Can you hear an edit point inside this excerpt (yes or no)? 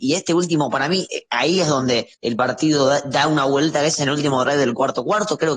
yes